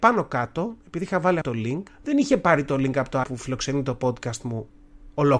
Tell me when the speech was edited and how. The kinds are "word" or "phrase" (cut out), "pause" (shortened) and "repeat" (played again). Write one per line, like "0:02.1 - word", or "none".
0:01.4 - word
0:01.9 - pause
0:03.2 - phrase